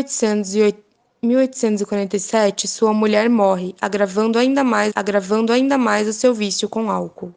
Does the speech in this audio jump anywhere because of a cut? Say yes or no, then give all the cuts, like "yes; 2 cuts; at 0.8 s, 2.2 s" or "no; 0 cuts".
yes; 1 cut; at 4.9 s